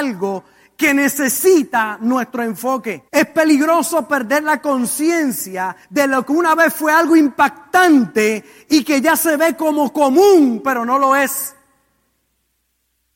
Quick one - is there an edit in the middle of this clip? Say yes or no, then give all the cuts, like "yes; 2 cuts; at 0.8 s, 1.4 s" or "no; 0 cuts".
yes; 2 cuts; at 3.1 s, 5.8 s